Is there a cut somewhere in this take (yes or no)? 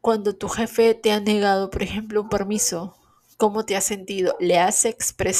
no